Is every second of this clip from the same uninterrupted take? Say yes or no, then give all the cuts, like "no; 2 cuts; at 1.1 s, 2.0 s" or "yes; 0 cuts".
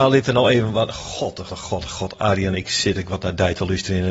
no; 2 cuts; at 1.5 s, 2.6 s